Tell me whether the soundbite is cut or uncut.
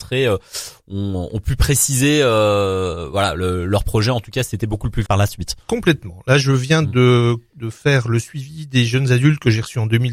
cut